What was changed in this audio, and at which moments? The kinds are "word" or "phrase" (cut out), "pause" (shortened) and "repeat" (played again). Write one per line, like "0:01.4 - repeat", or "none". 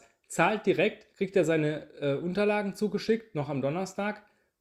0:01.1 - pause